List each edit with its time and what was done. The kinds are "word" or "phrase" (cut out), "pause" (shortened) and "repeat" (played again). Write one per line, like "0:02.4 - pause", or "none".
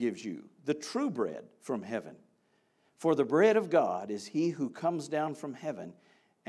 none

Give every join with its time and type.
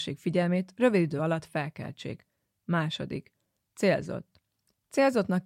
none

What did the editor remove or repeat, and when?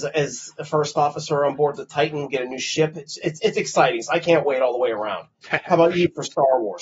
none

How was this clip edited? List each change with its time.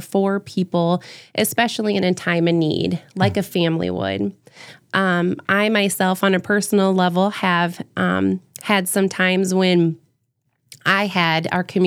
none

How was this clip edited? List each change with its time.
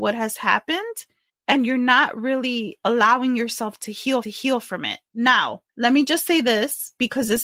0:01.3 - pause
0:04.2 - repeat
0:05.7 - pause

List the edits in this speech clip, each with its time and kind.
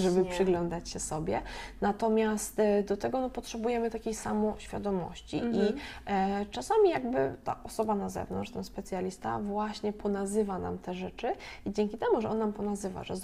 none

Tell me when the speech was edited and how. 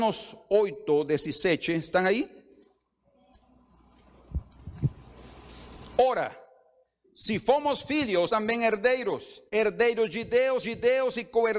0:08.3 - word
0:09.5 - pause
0:10.6 - repeat

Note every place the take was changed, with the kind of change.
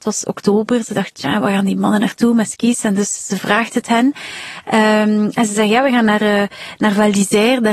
none

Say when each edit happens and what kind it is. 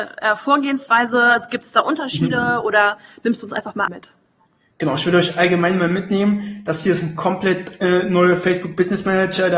0:03.9 - word

